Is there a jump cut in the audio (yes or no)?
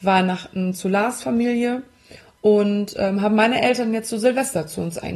no